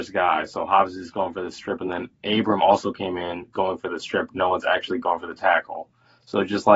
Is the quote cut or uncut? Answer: uncut